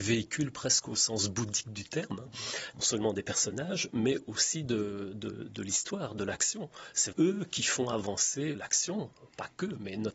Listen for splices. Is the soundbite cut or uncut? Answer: cut